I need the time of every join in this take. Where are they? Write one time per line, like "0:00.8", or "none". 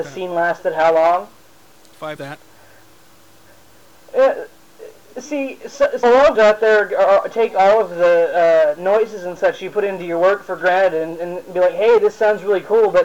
0:02.2
0:06.0
0:06.3

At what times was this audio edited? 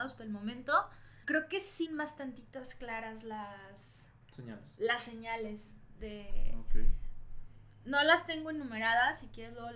0:01.2
0:01.8
0:04.2

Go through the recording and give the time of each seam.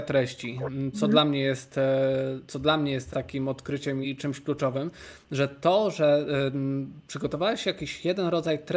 0:00.9
0:03.1
0:04.0

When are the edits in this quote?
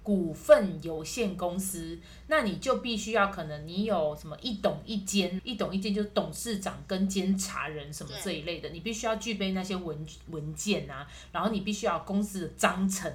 0:05.4

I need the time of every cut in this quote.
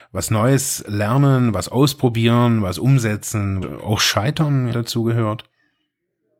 0:03.6
0:04.7

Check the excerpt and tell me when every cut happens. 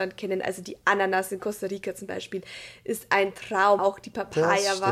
0:03.8

